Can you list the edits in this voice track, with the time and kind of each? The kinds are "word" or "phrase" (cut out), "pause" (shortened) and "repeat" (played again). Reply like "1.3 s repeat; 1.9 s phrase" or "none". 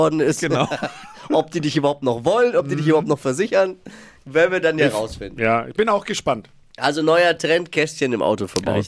none